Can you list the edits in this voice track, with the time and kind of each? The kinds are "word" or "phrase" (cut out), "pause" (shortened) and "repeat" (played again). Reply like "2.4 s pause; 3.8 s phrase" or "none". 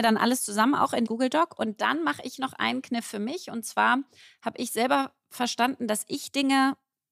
1.1 s phrase

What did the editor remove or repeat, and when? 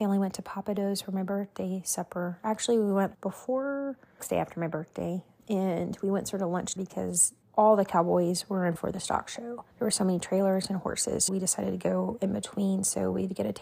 3.1 s word; 4.2 s phrase; 5.4 s word; 6.8 s word; 7.4 s pause; 8.8 s phrase; 9.7 s pause; 11.3 s word

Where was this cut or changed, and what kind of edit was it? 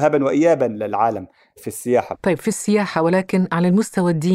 none

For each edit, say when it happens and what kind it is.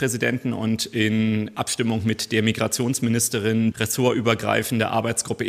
1.5 s word; 3.7 s word

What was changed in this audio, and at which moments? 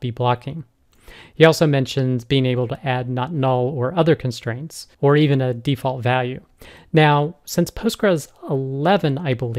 4.9 s pause

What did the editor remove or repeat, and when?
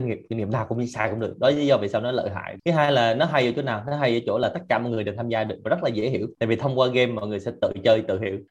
none

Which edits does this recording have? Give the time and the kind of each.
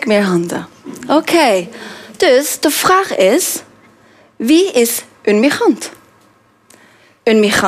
none

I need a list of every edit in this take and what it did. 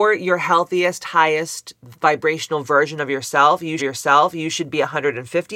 3.8 s repeat

